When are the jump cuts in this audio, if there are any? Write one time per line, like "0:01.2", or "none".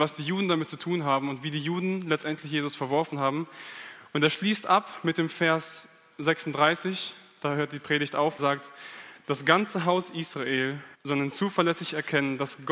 0:08.4
0:10.9

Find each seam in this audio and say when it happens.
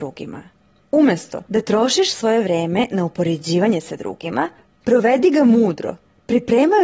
none

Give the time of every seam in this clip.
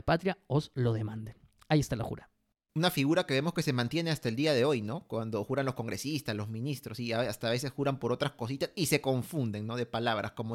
none

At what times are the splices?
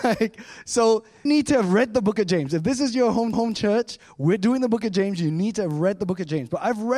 0:01.3
0:03.3

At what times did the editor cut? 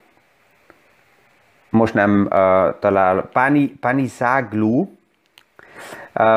none

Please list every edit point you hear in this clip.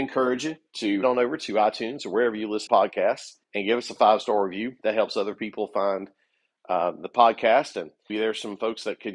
0:01.0
0:02.7
0:03.4
0:08.1

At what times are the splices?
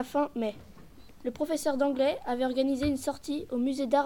none

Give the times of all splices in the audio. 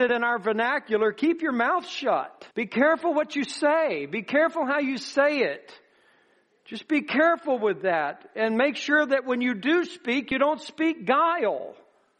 0:02.5

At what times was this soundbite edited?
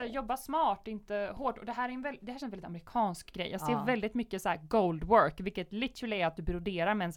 0:02.4

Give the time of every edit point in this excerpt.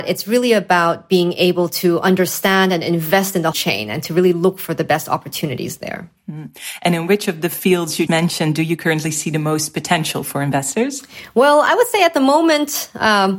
0:03.5
0:08.1

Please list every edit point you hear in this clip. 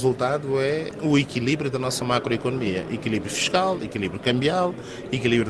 none

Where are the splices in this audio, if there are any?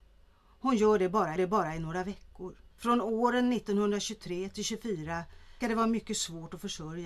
0:01.4
0:02.7
0:05.6

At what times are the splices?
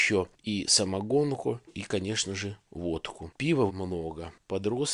0:01.7
0:03.7

